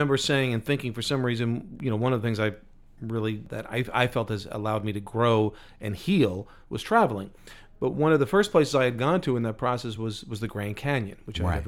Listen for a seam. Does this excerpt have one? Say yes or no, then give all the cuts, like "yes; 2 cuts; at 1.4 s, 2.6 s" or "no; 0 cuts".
no; 0 cuts